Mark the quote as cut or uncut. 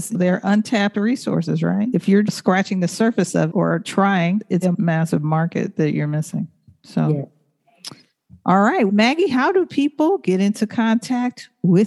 cut